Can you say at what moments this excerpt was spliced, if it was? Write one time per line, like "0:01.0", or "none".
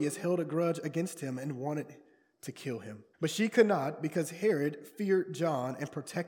0:03.1